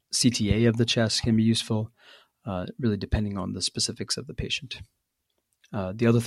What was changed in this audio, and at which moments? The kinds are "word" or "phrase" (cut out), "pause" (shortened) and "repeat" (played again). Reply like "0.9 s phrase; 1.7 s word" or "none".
none

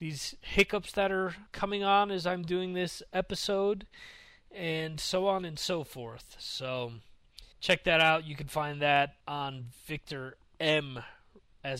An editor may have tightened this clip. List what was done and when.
1.5 s pause; 7.5 s pause; 9.2 s pause

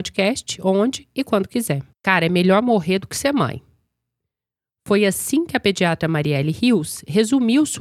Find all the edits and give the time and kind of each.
1.9 s pause

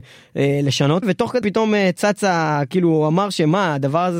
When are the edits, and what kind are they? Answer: 1.0 s phrase; 1.4 s word

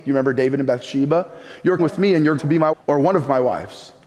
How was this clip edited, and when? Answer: 1.8 s word; 2.4 s word; 2.7 s word

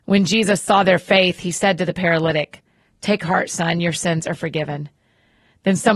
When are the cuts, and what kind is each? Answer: none

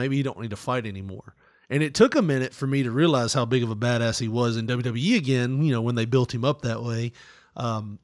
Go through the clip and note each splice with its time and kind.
none

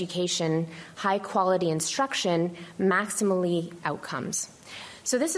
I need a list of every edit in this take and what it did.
3.8 s phrase

